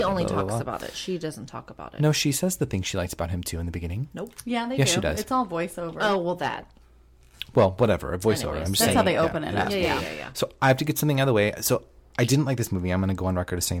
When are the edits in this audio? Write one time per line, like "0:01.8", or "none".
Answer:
none